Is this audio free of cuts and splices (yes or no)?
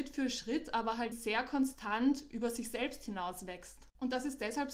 no